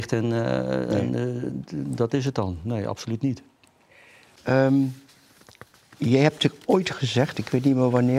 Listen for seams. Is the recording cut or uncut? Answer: uncut